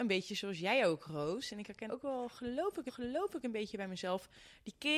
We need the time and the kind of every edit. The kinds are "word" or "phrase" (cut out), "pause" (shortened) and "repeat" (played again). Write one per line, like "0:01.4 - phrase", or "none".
0:01.9 - word
0:02.9 - repeat